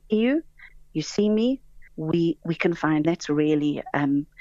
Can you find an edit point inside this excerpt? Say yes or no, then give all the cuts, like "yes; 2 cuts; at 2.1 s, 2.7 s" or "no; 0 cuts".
yes; 2 cuts; at 1.9 s, 3.0 s